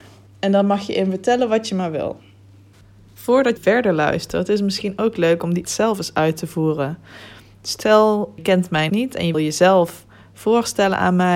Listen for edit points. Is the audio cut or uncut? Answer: cut